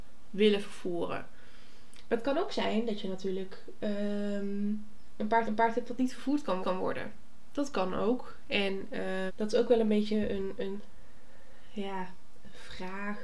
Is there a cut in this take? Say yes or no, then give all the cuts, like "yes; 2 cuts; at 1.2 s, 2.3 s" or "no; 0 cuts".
yes; 3 cuts; at 5.5 s, 6.6 s, 9.3 s